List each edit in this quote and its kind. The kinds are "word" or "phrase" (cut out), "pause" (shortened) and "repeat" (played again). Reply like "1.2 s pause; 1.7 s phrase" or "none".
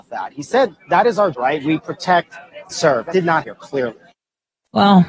1.3 s word; 2.7 s word; 3.1 s word; 3.4 s word

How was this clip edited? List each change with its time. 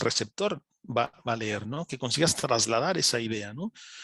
none

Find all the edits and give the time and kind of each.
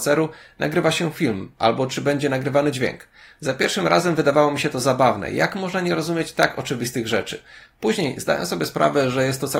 none

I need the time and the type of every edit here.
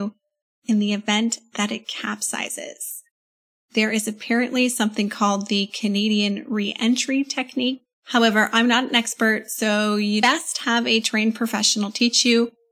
7.9 s pause

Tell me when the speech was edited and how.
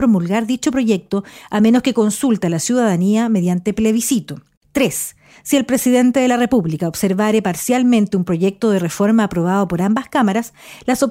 4.6 s pause

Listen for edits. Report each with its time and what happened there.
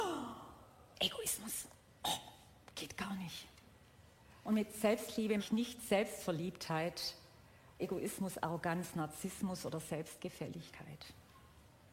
0.9 s word; 5.4 s word; 7.8 s word

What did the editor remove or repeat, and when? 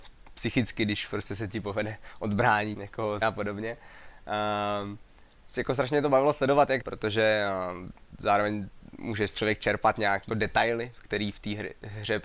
2.7 s word; 3.2 s word; 5.5 s word; 6.8 s word; 9.3 s word; 10.3 s word

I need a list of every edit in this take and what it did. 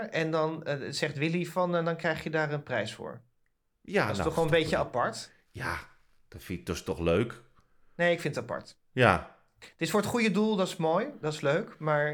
none

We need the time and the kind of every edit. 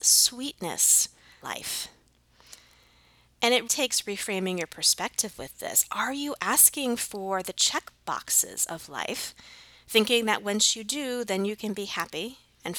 1.4 s word; 3.7 s word

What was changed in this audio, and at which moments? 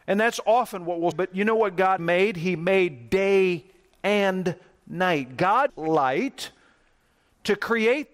1.1 s word; 2.0 s word; 5.7 s word

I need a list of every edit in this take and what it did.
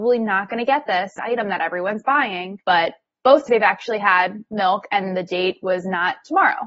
1.2 s phrase; 2.6 s pause; 3.5 s word

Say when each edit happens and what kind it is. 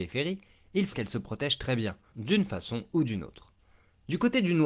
0.9 s word; 2.1 s phrase

